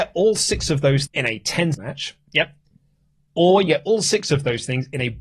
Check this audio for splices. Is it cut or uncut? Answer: cut